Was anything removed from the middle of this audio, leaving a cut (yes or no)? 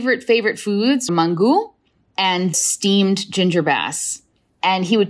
yes